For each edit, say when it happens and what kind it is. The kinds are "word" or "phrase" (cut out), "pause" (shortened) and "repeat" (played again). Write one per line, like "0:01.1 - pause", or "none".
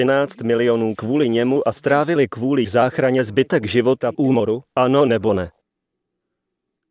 0:02.6 - word
0:04.1 - phrase
0:04.7 - pause